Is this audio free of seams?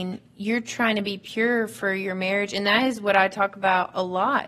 yes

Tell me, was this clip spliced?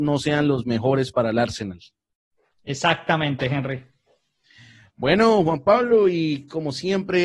no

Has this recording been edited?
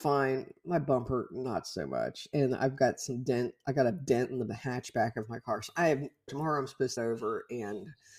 yes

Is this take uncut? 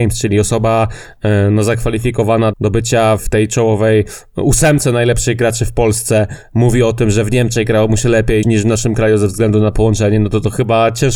no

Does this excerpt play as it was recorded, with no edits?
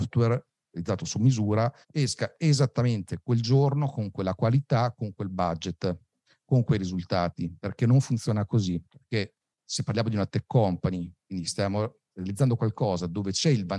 no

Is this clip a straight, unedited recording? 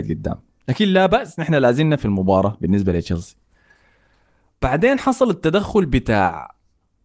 yes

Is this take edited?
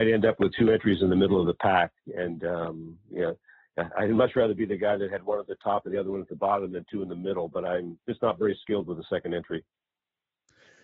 yes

